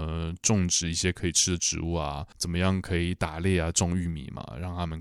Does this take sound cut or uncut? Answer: cut